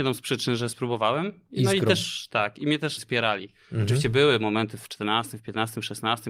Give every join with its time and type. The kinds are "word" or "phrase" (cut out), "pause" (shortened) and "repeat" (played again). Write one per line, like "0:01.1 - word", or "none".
0:03.0 - phrase